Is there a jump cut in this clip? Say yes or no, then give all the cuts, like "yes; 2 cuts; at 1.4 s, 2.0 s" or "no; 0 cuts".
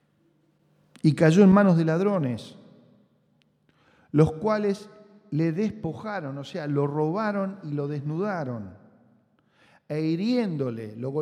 no; 0 cuts